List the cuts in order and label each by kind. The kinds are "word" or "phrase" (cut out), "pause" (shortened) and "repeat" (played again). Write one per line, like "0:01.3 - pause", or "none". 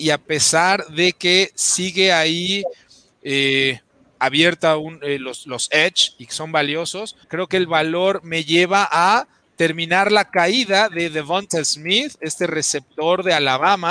0:07.2 - pause